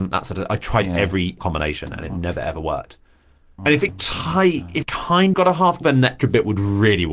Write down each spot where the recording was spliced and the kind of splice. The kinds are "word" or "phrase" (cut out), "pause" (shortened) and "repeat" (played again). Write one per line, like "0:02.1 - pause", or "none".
0:01.4 - word
0:03.6 - word
0:03.9 - word
0:04.8 - word
0:05.3 - word
0:05.8 - word
0:06.2 - word